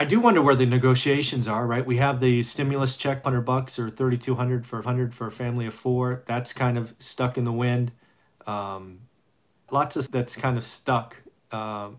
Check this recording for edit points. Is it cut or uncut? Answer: cut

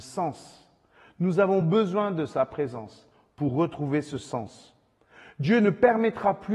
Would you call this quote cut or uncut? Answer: uncut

